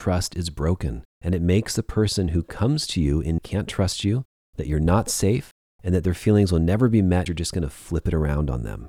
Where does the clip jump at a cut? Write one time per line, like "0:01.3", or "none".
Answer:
0:01.1
0:03.4
0:07.3